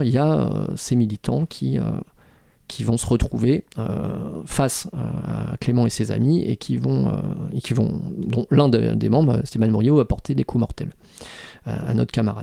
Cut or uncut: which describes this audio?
uncut